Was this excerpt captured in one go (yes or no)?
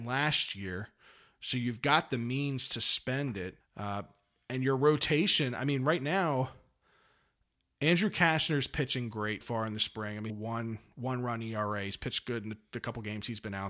no